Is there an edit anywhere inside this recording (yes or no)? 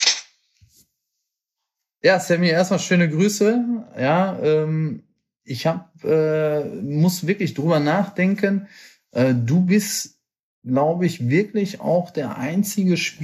no